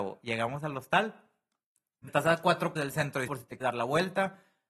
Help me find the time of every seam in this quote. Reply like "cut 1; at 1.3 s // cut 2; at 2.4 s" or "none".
cut 1; at 2.1 s // cut 2; at 2.8 s // cut 3; at 3.3 s // cut 4; at 3.6 s

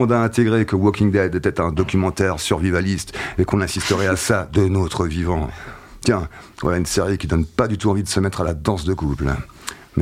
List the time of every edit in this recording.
none

